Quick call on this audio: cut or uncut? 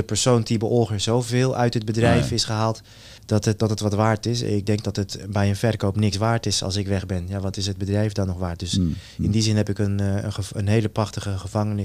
cut